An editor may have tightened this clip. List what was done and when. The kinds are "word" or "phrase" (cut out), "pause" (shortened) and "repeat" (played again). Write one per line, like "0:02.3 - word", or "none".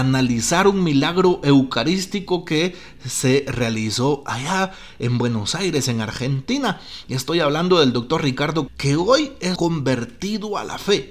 0:08.7 - word
0:09.6 - phrase